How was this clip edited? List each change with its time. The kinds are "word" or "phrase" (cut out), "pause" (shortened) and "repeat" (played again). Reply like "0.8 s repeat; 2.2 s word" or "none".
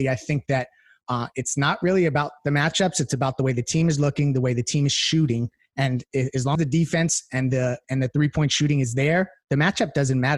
6.6 s word; 7.8 s word